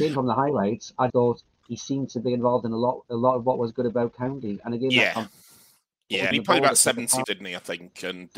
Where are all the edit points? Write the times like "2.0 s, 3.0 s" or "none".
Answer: 1.1 s, 6.3 s, 7.2 s